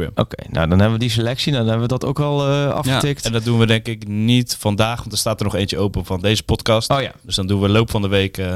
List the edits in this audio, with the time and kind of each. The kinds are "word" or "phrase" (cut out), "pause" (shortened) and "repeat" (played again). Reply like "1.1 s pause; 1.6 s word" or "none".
none